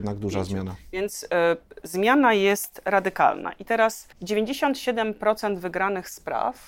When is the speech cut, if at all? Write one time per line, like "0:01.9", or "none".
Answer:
0:01.8
0:04.1

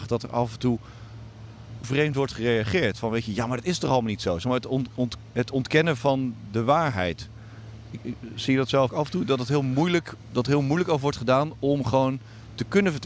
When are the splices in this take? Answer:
0:01.8
0:06.0
0:08.9

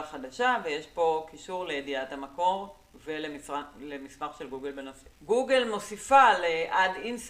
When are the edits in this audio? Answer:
0:05.1

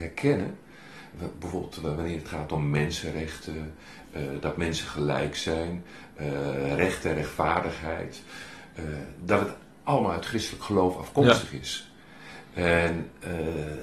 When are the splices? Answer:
none

